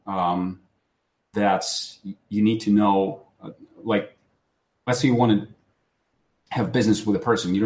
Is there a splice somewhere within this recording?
no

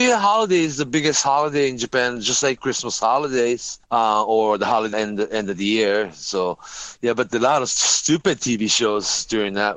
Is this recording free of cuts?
no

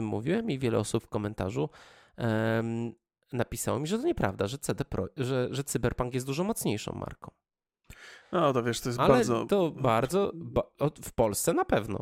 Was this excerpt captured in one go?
yes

